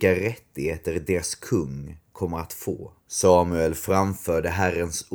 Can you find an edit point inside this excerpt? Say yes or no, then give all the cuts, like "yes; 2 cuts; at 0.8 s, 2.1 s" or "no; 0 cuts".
yes; 1 cut; at 3.0 s